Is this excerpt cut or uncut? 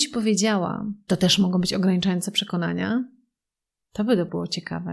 cut